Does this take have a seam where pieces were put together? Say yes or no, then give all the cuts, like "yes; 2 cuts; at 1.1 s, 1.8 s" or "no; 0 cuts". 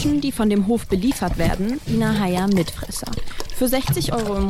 yes; 1 cut; at 1.9 s